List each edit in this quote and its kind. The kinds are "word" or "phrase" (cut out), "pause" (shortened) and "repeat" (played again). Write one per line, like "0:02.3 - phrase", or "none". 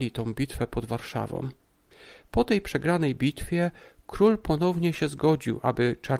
none